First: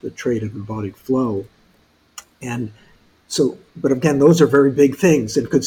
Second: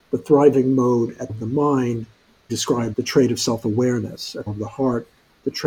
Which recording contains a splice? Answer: second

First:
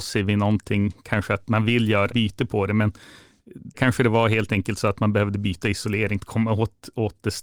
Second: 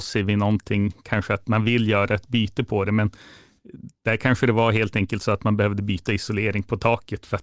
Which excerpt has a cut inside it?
first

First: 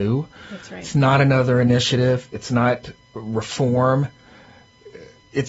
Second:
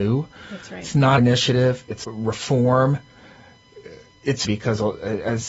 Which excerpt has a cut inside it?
second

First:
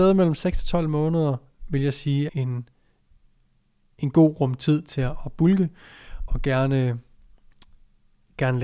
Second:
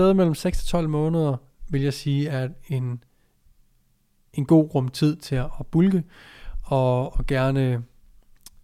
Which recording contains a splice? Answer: first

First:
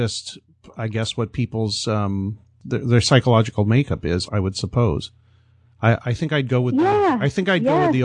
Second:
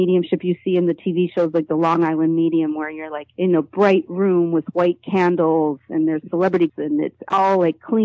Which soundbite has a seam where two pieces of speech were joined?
second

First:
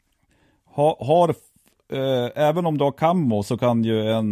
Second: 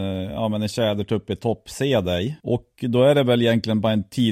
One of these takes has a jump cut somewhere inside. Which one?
second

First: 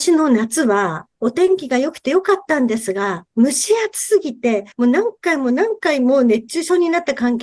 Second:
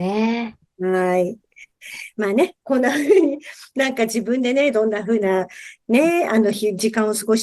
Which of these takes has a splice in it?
first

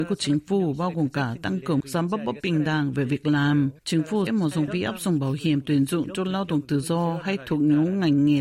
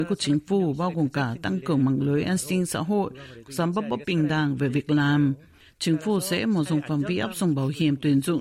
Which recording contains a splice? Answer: first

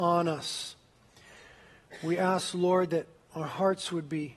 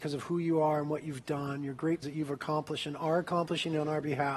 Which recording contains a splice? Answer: second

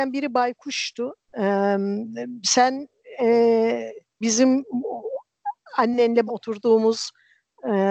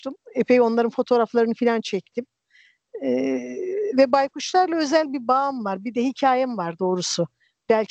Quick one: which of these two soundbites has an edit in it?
first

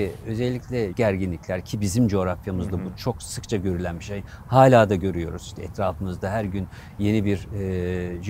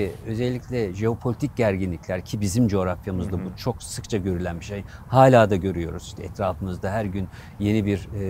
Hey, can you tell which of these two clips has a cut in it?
first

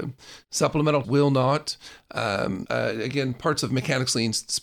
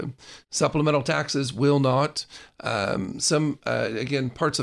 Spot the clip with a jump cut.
first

